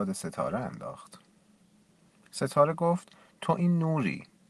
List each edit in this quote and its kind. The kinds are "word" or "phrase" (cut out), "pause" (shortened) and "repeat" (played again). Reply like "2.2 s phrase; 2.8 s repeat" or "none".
none